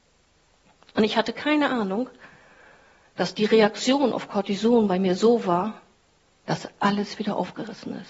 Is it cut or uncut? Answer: uncut